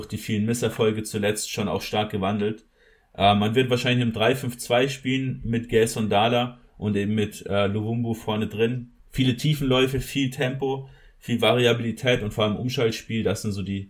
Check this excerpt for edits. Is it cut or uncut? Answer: cut